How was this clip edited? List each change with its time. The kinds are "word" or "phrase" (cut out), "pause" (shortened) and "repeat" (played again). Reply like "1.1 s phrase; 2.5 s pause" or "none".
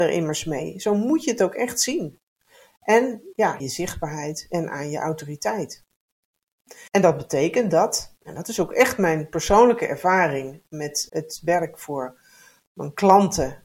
3.6 s phrase; 6.9 s pause; 11.1 s word